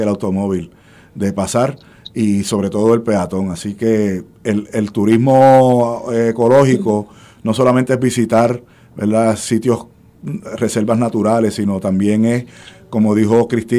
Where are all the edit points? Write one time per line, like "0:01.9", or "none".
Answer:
none